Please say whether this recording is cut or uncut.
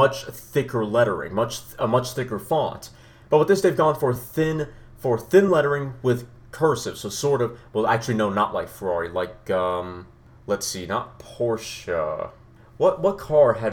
uncut